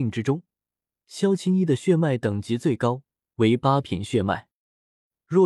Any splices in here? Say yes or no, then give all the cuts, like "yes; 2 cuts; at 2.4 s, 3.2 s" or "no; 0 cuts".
no; 0 cuts